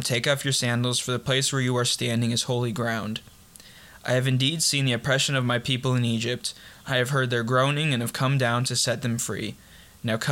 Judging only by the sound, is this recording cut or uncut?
uncut